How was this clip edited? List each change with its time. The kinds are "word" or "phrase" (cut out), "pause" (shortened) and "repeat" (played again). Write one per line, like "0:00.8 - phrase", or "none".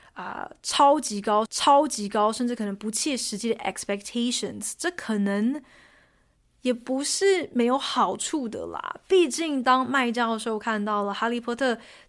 0:01.5 - repeat